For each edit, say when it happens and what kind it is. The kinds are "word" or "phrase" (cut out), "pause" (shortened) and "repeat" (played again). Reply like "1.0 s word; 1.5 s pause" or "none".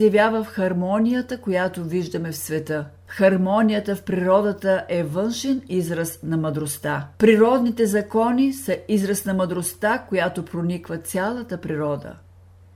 3.0 s pause; 7.1 s pause